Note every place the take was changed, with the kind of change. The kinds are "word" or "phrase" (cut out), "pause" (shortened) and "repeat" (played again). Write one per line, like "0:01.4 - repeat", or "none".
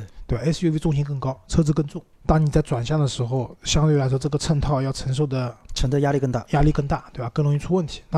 0:02.1 - pause